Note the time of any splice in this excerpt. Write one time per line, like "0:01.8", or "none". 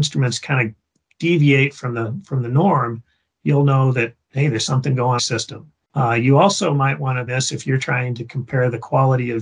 0:05.2
0:05.8
0:07.3